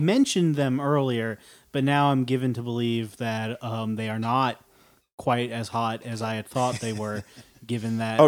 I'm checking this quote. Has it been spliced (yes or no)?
no